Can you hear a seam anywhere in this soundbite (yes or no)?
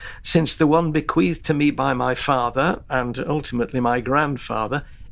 no